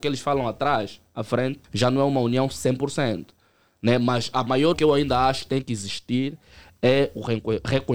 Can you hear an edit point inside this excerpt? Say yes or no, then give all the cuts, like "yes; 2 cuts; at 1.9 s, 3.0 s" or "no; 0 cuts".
yes; 2 cuts; at 1.6 s, 4.7 s